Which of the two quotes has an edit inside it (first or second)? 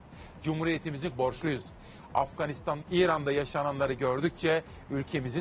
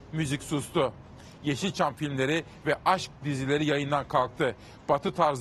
first